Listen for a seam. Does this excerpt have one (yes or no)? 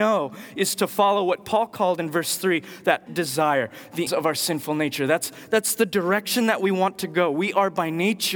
yes